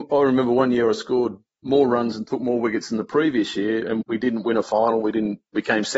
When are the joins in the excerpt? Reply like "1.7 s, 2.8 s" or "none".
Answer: 4.0 s

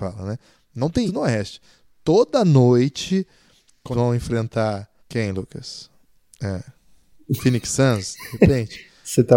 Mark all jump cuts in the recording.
1.1 s, 3.9 s, 5.0 s

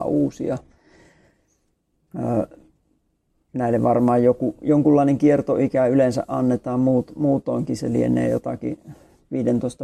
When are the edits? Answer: none

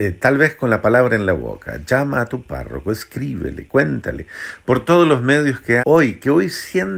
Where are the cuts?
5.8 s

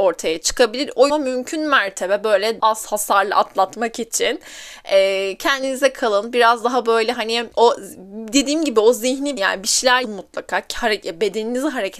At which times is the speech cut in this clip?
1.1 s, 2.6 s, 7.5 s, 9.4 s, 10.0 s

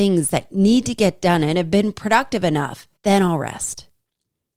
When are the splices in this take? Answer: 3.0 s

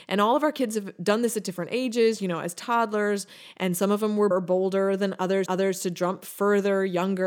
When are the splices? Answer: 4.3 s, 5.5 s

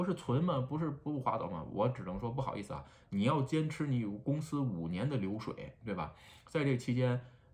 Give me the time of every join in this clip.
none

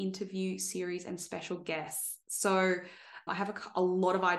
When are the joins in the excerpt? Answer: 3.3 s

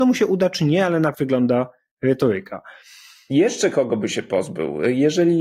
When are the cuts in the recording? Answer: 1.1 s

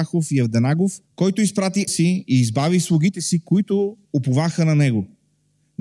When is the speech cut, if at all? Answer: 1.1 s, 1.9 s, 4.0 s

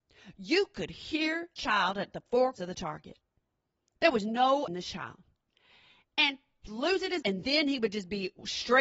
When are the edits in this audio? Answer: 1.6 s, 2.5 s, 4.7 s, 6.7 s, 7.2 s

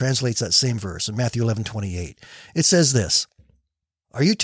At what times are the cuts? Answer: none

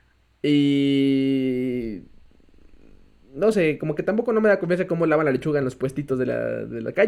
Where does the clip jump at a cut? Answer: none

